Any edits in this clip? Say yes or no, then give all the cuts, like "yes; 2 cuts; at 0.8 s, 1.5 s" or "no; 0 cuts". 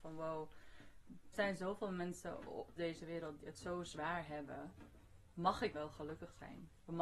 yes; 4 cuts; at 1.3 s, 2.8 s, 3.4 s, 5.7 s